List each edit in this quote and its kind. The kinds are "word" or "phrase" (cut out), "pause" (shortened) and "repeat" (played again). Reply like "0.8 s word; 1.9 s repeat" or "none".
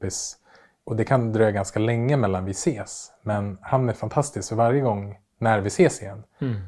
none